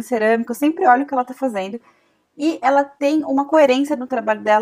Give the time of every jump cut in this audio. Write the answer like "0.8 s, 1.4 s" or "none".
none